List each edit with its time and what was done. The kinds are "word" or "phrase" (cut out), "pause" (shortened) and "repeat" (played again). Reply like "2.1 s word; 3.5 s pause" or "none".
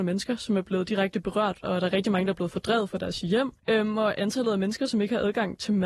3.6 s pause